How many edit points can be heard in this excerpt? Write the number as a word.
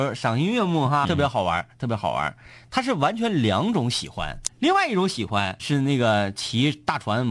three